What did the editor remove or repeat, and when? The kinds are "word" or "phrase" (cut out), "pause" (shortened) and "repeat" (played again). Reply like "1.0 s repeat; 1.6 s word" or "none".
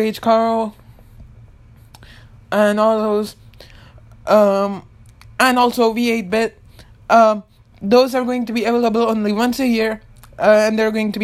none

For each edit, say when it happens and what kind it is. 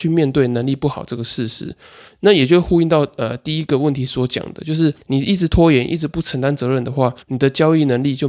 5.0 s pause; 7.2 s pause

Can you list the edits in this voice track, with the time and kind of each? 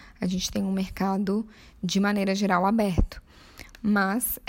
none

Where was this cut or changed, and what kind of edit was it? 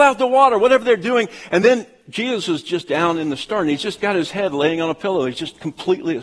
none

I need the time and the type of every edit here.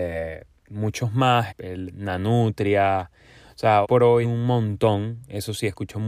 1.5 s word; 3.8 s word; 4.2 s word

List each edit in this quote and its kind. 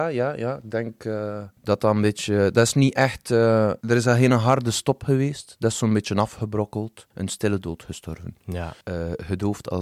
1.6 s pause; 3.8 s pause; 7.1 s pause; 8.8 s pause

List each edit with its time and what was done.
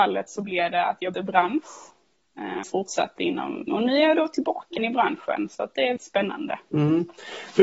1.1 s word; 2.6 s word; 3.7 s word; 4.8 s word; 6.0 s word

